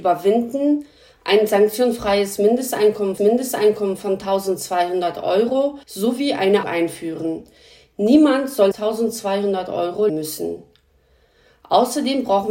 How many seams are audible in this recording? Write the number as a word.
five